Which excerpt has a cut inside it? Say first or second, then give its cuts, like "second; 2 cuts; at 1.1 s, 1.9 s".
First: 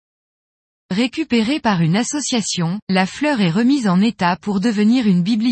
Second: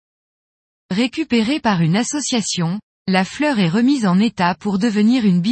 first; 1 cut; at 2.8 s